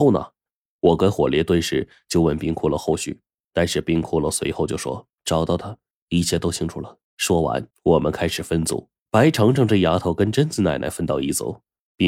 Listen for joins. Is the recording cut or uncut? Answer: cut